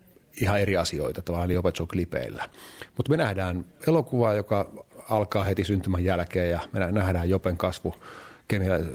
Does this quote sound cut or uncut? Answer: uncut